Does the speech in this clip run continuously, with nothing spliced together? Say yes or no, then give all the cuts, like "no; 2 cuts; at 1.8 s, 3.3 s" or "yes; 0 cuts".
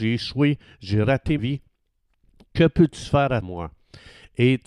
no; 2 cuts; at 1.4 s, 3.4 s